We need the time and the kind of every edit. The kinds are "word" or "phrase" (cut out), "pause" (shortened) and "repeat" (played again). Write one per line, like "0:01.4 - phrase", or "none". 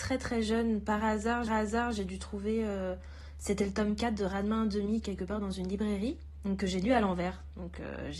0:01.5 - repeat